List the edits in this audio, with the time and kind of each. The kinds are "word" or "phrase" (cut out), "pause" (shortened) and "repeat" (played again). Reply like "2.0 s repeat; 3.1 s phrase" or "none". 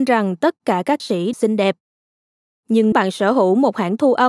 1.0 s word; 1.3 s word; 2.9 s word